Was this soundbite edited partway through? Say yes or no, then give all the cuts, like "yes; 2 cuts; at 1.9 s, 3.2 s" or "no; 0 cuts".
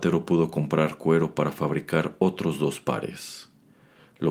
no; 0 cuts